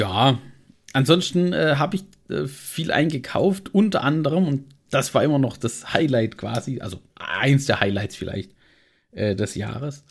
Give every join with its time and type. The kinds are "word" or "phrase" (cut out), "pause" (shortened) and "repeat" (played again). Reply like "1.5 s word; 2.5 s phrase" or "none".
7.1 s pause